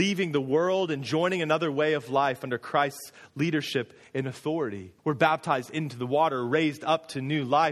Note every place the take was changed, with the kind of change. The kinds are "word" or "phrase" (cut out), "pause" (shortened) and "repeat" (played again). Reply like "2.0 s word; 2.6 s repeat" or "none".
5.0 s pause